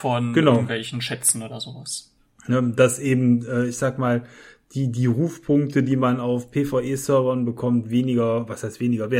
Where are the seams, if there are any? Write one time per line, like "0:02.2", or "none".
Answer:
none